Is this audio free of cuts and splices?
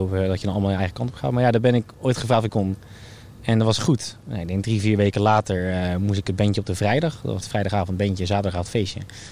no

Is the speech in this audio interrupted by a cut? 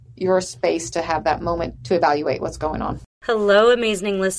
yes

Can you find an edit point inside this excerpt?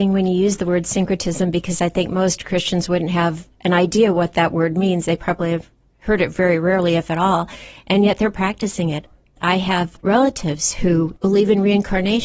no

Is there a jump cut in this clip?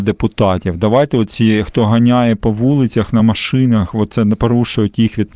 no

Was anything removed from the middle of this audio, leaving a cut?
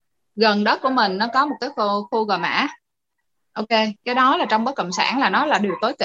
no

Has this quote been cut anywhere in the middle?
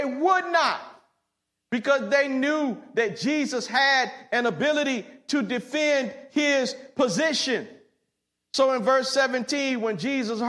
no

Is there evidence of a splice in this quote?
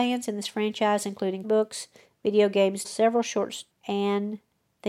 yes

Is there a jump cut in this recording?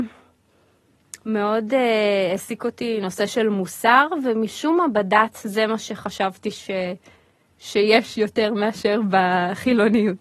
no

